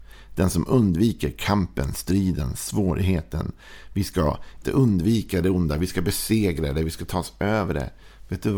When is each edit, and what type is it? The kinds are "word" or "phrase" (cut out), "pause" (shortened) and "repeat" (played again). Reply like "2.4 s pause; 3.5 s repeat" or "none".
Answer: 4.6 s word